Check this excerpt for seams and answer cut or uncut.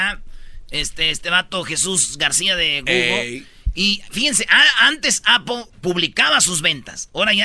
cut